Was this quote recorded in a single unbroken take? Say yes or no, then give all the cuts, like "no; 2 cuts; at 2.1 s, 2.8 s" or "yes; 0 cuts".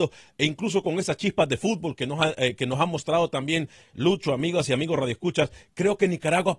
yes; 0 cuts